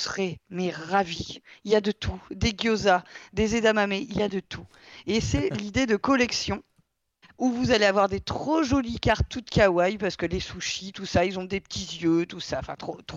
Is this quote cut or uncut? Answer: uncut